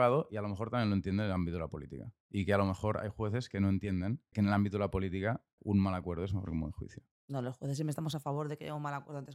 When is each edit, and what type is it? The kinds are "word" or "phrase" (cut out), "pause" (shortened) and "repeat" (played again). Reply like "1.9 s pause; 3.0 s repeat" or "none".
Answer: 4.3 s word; 5.6 s word